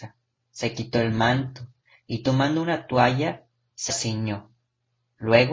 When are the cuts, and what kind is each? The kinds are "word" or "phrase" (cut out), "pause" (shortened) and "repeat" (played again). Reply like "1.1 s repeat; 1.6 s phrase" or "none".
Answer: 3.9 s word